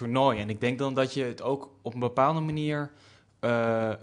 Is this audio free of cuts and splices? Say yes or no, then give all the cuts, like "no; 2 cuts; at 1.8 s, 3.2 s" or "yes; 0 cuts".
yes; 0 cuts